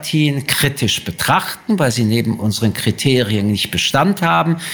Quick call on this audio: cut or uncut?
uncut